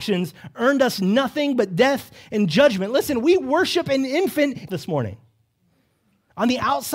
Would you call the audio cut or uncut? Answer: cut